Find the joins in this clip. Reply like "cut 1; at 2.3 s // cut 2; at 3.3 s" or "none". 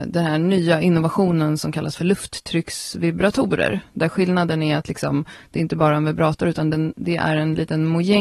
none